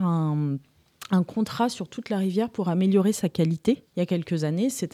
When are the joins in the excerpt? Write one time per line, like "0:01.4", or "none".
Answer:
0:03.9